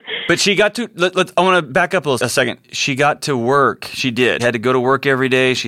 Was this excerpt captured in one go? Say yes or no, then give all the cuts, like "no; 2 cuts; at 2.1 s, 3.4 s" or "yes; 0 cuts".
no; 2 cuts; at 2.2 s, 4.4 s